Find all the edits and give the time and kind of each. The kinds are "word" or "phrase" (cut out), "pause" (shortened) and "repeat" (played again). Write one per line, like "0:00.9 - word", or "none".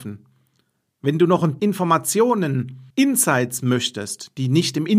0:01.6 - word
0:02.9 - pause